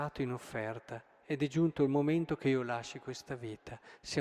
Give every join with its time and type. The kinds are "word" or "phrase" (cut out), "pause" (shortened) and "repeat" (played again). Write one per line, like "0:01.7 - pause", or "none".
none